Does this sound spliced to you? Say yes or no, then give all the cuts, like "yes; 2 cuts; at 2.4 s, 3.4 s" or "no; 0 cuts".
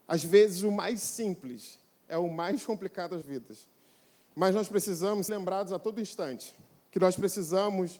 yes; 2 cuts; at 3.2 s, 5.3 s